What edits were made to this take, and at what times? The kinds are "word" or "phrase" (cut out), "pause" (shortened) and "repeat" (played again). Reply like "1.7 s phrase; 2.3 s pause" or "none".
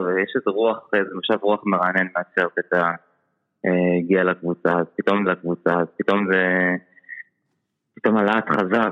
5.3 s repeat

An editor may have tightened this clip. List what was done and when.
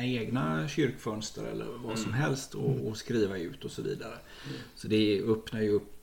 2.8 s word

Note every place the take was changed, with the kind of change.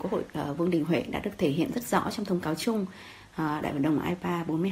none

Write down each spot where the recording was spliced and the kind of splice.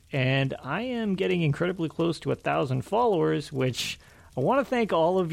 none

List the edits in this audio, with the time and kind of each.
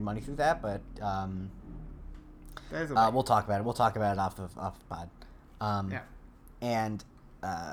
none

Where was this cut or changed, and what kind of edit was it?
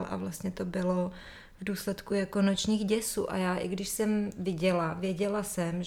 none

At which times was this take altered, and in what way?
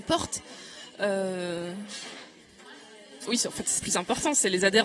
3.2 s word; 3.8 s phrase

